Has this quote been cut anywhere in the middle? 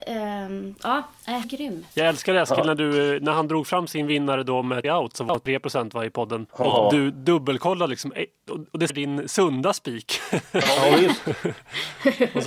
yes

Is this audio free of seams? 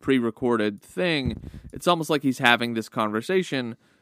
yes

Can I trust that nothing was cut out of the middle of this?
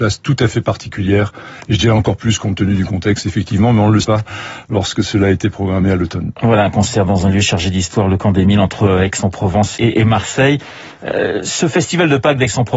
no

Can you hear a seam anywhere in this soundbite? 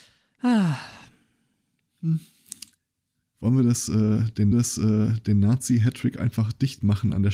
yes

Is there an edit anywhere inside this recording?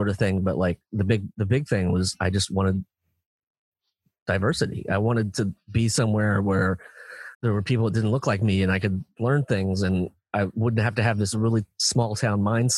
yes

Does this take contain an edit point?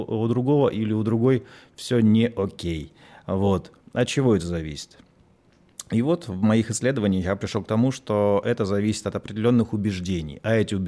no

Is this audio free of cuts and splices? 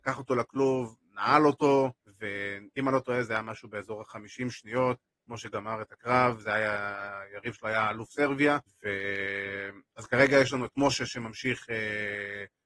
no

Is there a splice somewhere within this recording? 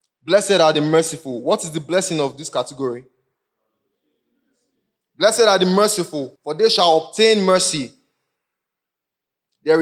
yes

